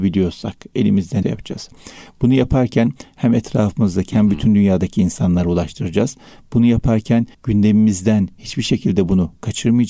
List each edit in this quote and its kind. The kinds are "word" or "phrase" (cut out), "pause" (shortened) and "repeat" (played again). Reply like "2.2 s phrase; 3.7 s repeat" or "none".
1.2 s phrase; 7.3 s pause